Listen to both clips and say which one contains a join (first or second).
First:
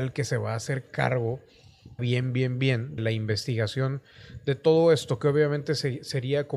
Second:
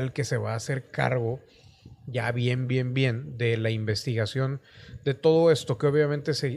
first